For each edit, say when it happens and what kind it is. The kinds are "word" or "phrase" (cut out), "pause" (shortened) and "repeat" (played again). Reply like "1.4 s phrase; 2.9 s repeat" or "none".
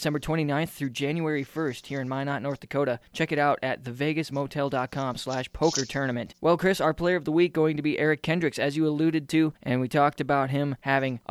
3.1 s pause